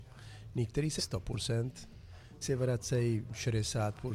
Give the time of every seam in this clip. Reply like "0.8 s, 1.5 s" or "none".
1.0 s, 2.4 s

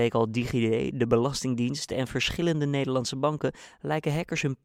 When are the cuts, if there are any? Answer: none

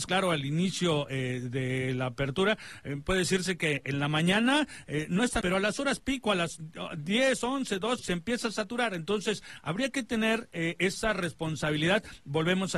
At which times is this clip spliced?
5.4 s, 8.0 s

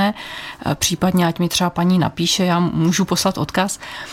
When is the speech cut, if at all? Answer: none

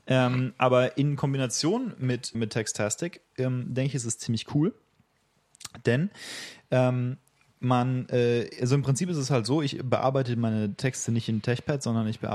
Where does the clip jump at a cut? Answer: 2.3 s

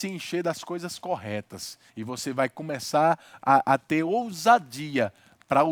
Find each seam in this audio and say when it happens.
1.9 s

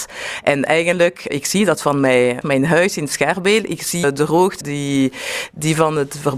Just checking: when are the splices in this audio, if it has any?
1.3 s, 2.4 s, 4.0 s, 4.6 s

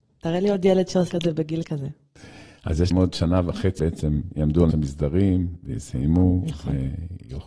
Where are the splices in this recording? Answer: 1.1 s, 2.9 s, 3.8 s, 4.7 s

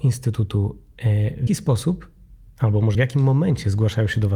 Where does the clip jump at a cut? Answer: 1.5 s, 2.9 s

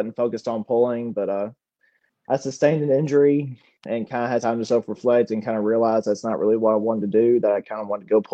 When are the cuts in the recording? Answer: 4.4 s

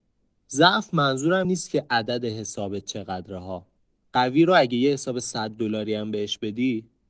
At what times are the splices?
1.4 s, 3.8 s

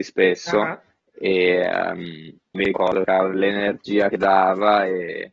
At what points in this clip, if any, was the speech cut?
2.5 s, 3.3 s

